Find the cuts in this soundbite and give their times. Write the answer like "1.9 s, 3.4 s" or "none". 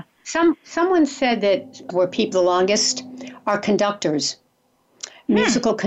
1.9 s, 2.3 s